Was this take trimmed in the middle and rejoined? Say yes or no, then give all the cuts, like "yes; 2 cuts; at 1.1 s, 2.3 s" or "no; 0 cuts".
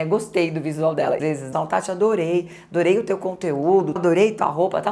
yes; 3 cuts; at 1.2 s, 1.5 s, 4.0 s